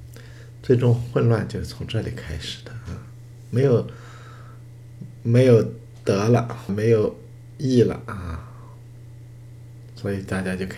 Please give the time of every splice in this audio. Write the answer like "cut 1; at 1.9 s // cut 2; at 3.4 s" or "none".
cut 1; at 6.7 s